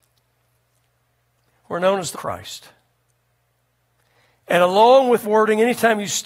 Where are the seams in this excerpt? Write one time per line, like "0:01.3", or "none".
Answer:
0:02.1
0:05.2